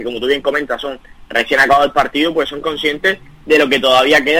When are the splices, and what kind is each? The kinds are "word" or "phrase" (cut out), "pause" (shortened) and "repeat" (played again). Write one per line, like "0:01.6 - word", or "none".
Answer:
none